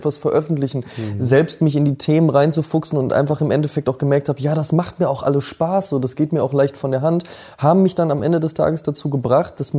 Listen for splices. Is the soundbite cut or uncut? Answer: uncut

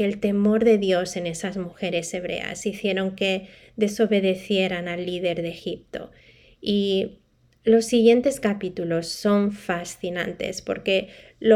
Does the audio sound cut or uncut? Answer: uncut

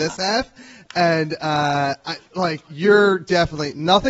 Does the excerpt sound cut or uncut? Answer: uncut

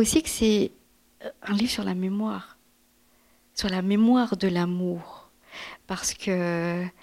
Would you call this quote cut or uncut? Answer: uncut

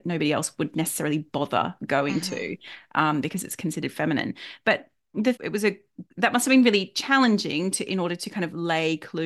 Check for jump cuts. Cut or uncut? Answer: cut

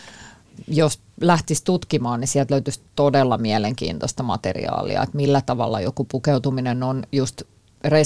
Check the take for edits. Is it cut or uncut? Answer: uncut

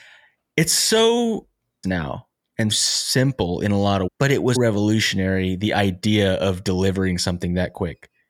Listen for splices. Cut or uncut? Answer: cut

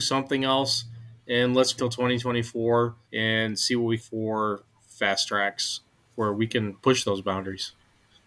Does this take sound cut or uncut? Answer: cut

